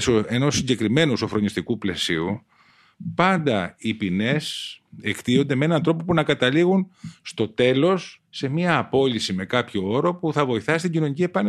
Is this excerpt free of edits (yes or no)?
no